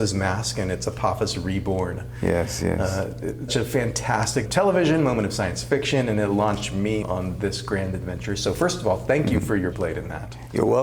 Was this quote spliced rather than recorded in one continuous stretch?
yes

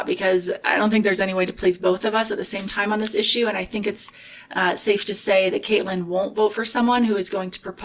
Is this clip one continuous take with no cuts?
yes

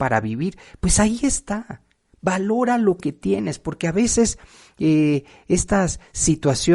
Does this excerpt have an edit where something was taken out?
no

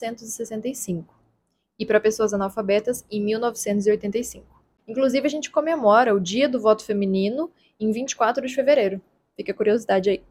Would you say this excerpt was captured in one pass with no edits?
yes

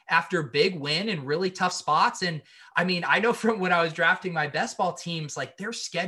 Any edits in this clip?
no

